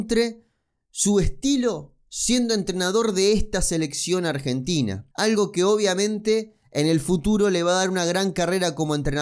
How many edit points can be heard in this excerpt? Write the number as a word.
one